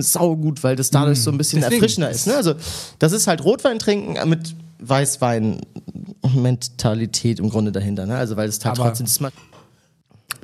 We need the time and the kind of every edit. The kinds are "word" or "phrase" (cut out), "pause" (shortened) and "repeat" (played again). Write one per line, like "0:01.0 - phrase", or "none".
none